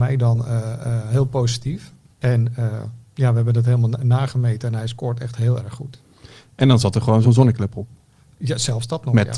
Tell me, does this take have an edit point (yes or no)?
yes